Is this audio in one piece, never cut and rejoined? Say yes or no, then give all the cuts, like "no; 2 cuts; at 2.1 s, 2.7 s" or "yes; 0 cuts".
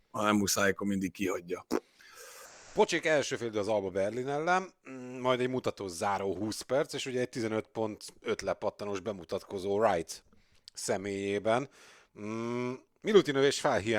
yes; 0 cuts